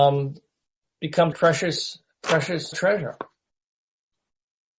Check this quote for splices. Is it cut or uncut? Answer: cut